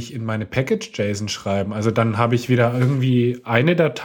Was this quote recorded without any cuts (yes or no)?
yes